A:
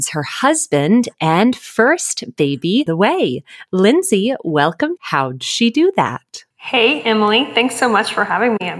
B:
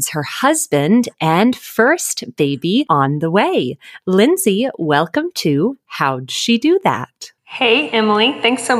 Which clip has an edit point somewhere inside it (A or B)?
A